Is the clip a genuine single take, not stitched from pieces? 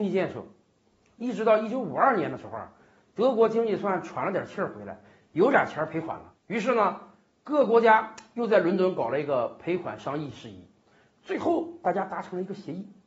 no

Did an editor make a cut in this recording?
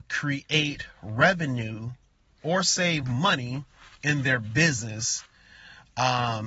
no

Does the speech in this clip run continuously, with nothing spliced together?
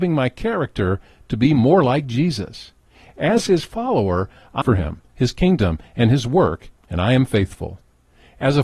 no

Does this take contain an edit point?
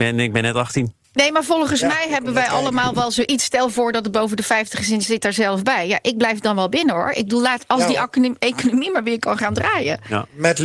no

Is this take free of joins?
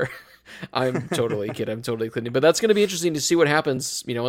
yes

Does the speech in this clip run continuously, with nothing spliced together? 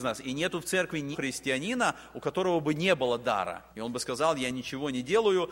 no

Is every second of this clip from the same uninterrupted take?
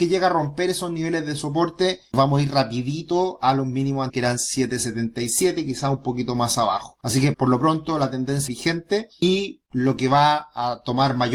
no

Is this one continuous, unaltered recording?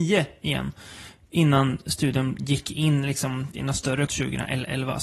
no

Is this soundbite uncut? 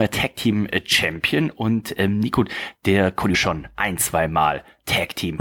no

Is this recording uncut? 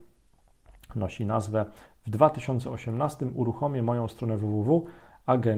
yes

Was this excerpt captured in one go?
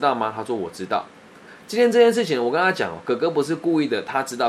yes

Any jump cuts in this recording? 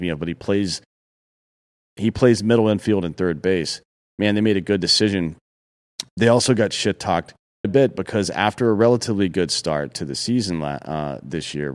yes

